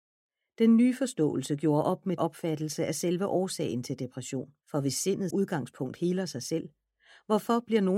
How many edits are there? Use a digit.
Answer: 3